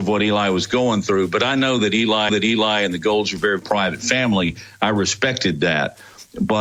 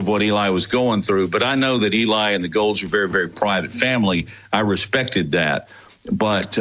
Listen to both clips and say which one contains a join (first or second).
first